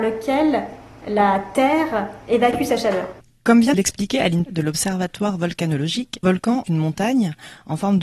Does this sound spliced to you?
yes; 5 cuts; at 3.2 s, 3.7 s, 4.5 s, 6.2 s, 6.7 s

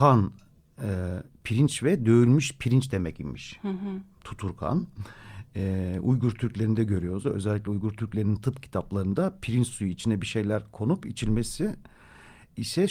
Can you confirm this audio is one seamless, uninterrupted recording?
yes; 0 cuts

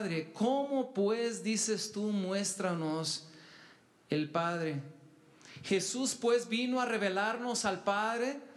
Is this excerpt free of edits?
yes; 0 cuts

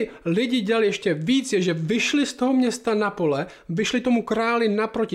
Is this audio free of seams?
yes; 0 cuts

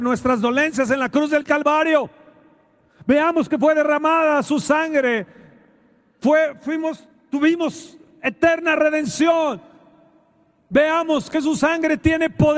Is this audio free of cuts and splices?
yes; 0 cuts

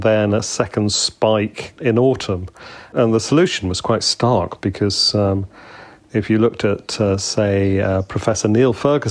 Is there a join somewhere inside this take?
no; 0 cuts

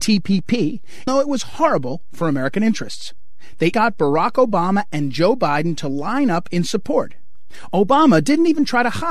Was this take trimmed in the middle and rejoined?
yes; 2 cuts; at 1.1 s, 3.7 s

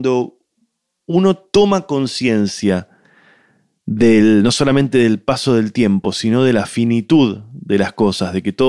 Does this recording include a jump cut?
no; 0 cuts

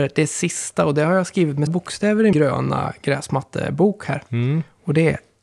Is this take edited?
yes; 2 cuts; at 1.7 s, 2.3 s

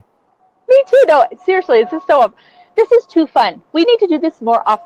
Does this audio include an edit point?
no; 0 cuts

